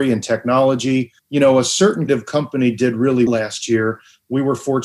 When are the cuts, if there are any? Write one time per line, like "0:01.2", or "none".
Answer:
0:01.2
0:02.1
0:03.3